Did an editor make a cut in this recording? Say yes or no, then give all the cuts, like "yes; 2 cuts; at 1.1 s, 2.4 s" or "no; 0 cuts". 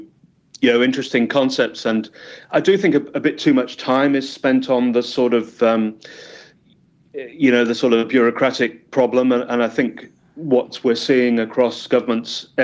yes; 1 cut; at 2.5 s